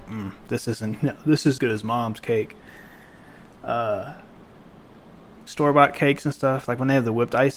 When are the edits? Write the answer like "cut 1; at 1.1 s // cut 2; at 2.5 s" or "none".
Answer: cut 1; at 1.6 s // cut 2; at 5.5 s